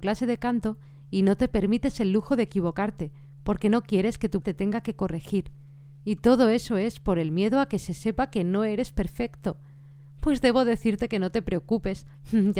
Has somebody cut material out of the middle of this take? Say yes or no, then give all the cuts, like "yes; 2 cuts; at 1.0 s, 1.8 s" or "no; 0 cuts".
yes; 1 cut; at 4.4 s